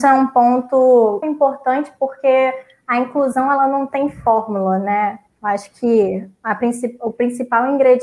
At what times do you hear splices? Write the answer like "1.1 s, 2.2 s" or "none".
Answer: 1.2 s